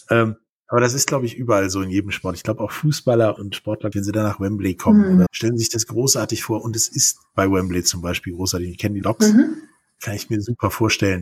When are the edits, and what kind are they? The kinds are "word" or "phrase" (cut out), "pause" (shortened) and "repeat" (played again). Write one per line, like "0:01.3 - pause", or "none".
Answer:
0:03.4 - word
0:03.9 - word
0:05.3 - word
0:09.0 - word